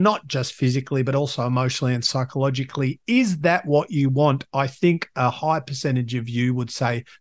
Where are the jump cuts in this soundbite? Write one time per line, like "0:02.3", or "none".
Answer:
none